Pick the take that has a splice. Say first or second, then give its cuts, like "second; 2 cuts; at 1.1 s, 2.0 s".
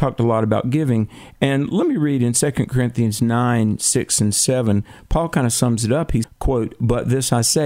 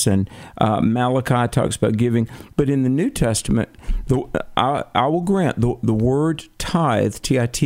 first; 1 cut; at 6.2 s